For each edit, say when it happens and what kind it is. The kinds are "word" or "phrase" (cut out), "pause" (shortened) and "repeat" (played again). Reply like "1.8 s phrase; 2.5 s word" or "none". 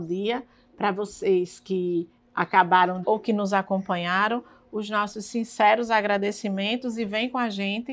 3.0 s word